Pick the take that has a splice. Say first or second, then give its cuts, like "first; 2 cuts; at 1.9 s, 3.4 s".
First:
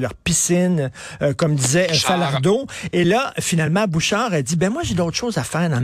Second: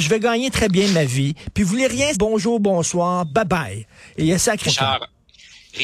second; 2 cuts; at 2.1 s, 4.7 s